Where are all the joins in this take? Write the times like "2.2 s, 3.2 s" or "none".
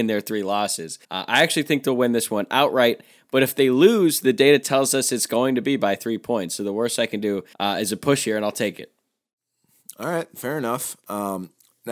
1.0 s, 7.5 s